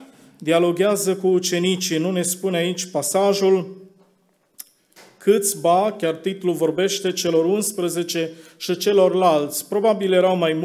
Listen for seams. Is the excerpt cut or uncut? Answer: uncut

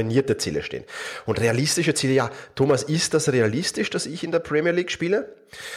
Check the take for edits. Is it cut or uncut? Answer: uncut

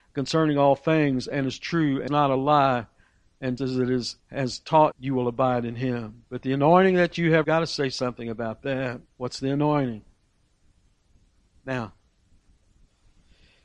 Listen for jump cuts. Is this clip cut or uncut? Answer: cut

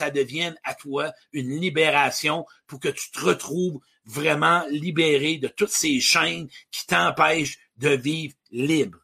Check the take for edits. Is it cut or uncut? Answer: uncut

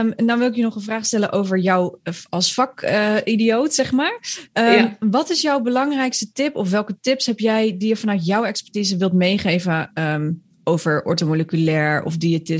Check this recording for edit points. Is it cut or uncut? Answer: uncut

